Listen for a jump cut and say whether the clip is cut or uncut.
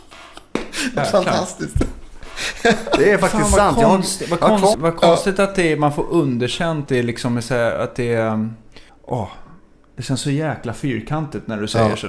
cut